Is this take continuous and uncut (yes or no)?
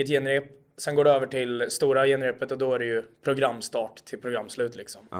yes